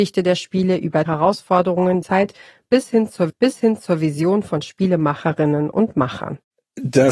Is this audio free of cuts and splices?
no; 3 cuts; at 1.1 s, 2.0 s, 3.3 s

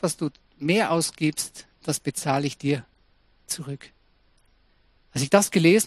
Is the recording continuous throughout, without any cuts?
yes; 0 cuts

